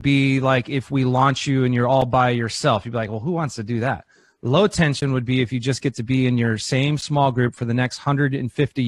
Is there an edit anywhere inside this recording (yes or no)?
no